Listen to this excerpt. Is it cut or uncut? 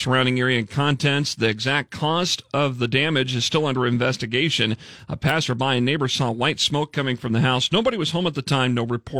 uncut